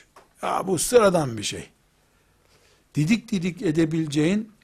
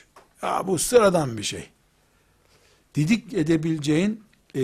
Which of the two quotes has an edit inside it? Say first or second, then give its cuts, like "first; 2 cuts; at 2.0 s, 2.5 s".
second; 1 cut; at 3.3 s